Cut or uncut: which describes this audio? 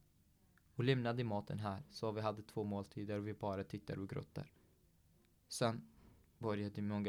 uncut